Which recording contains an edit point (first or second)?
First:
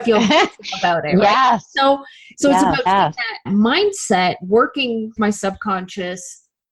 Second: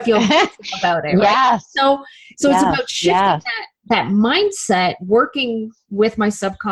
first